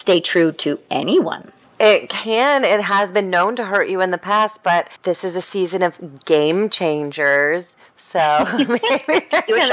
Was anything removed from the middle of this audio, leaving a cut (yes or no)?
yes